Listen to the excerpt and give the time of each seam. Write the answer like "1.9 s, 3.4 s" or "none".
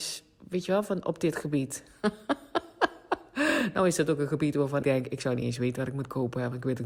4.8 s